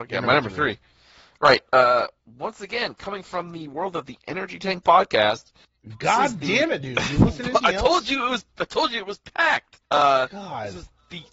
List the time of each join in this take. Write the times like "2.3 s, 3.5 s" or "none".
9.9 s